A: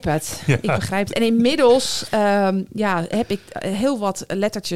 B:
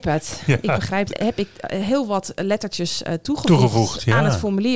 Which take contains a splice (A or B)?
B